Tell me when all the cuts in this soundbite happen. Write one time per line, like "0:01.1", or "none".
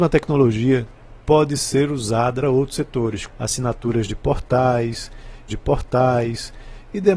0:02.4
0:03.3
0:05.5